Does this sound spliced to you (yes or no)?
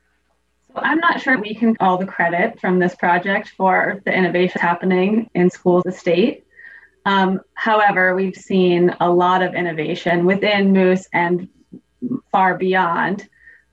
yes